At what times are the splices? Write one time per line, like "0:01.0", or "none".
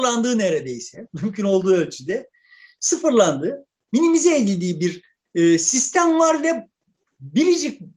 none